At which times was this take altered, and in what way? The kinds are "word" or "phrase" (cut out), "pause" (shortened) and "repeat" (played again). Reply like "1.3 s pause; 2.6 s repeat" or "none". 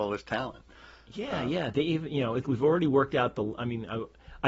2.4 s word